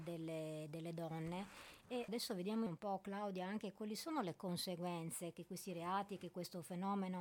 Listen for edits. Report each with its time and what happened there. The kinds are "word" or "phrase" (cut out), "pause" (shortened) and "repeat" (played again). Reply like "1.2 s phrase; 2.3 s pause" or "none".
2.1 s word; 2.7 s word